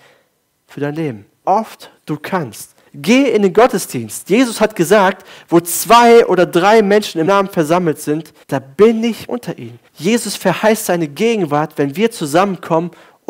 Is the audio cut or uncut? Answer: cut